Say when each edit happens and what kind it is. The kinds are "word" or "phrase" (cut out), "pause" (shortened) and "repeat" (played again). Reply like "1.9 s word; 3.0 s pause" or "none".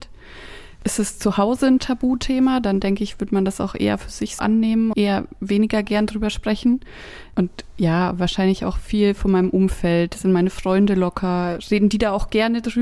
4.4 s word; 4.9 s word